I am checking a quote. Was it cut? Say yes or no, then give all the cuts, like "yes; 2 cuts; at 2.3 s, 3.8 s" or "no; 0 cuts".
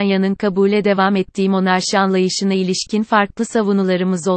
no; 0 cuts